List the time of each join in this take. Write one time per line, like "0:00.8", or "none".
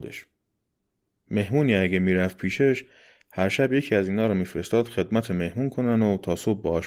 none